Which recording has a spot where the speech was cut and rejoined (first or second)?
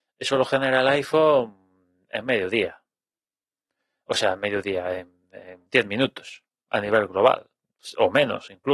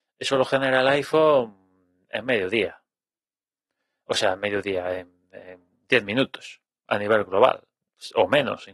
first